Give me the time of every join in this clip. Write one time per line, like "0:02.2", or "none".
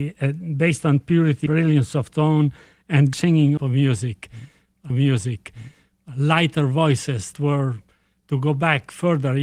0:01.5
0:03.1
0:03.6
0:04.9
0:07.3